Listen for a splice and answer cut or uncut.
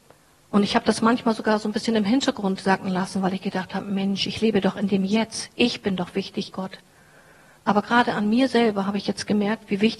cut